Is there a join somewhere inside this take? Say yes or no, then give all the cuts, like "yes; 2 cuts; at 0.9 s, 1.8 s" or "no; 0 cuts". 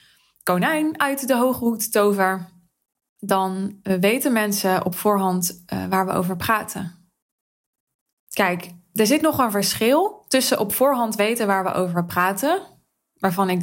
no; 0 cuts